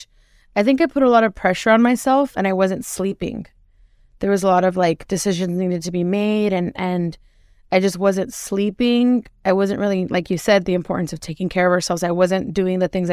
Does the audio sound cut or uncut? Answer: uncut